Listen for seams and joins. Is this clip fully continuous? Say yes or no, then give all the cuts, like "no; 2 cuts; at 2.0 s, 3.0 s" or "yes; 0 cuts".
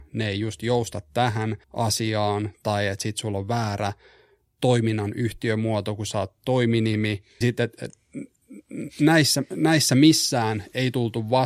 no; 2 cuts; at 1.6 s, 7.4 s